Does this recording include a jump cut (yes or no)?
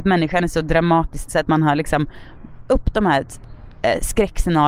yes